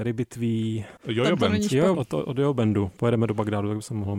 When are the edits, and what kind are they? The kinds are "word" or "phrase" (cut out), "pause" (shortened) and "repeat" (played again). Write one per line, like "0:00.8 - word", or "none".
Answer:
0:01.0 - pause
0:01.9 - word